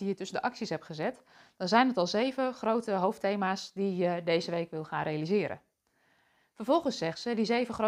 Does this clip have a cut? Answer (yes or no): no